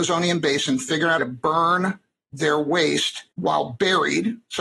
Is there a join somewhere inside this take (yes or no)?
yes